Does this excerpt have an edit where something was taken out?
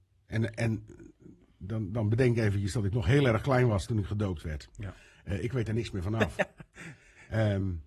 no; 0 cuts

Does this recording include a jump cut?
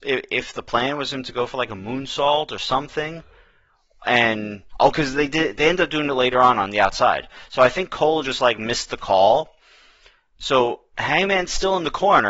no; 0 cuts

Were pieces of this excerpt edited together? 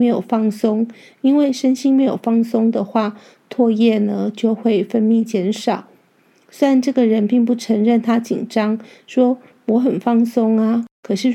no; 0 cuts

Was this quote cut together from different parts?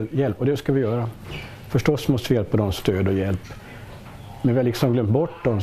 yes; 1 cut; at 2.8 s

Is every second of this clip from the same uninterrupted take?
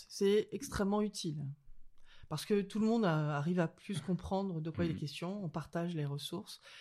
yes; 0 cuts

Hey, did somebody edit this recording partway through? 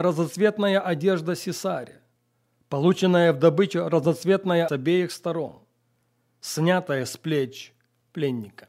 yes; 1 cut; at 4.7 s

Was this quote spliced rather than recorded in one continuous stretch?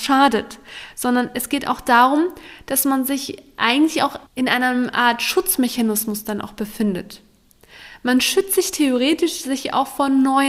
yes; 1 cut; at 4.3 s

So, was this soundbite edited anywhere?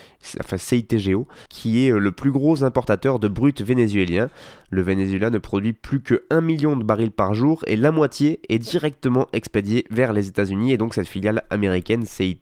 yes; 1 cut; at 1.5 s

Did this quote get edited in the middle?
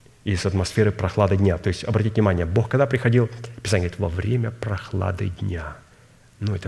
no; 0 cuts

